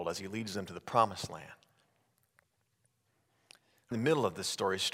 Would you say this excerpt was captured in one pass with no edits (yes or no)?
no